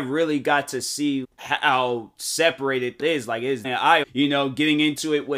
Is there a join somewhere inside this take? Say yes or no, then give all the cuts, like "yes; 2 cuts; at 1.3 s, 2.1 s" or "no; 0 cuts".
yes; 4 cuts; at 1.2 s, 3.0 s, 3.6 s, 4.0 s